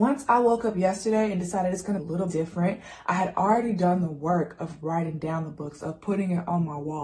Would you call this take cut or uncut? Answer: cut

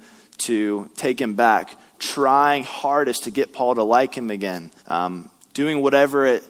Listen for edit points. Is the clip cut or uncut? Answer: cut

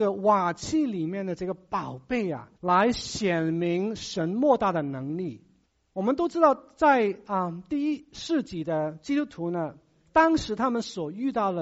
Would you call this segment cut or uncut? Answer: cut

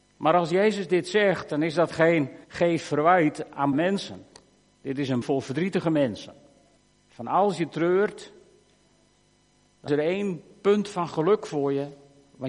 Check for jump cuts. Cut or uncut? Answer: cut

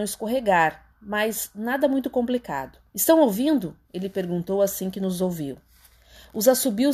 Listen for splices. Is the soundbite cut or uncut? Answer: cut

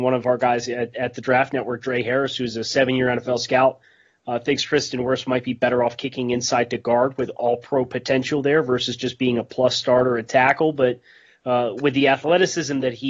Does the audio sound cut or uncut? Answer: uncut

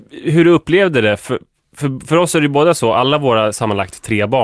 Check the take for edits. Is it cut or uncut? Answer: uncut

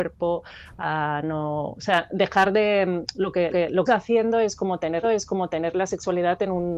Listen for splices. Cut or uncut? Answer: cut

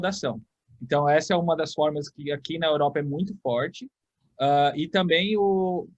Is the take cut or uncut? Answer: uncut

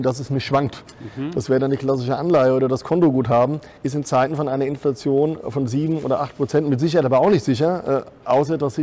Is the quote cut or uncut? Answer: cut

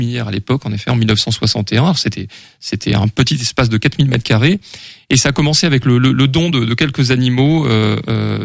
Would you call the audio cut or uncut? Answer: uncut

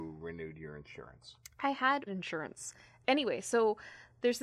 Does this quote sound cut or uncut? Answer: cut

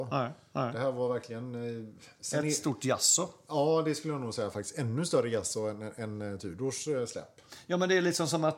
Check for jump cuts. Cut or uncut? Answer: uncut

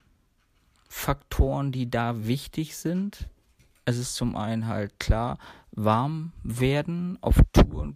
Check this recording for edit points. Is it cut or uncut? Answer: uncut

